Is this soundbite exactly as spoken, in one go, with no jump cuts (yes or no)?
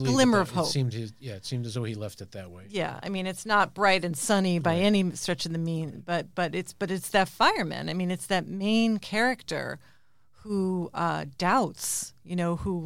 yes